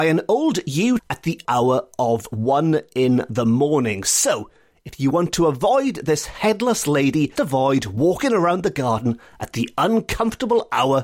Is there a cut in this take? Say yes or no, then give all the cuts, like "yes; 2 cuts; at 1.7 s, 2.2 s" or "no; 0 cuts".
yes; 3 cuts; at 1.0 s, 1.4 s, 7.4 s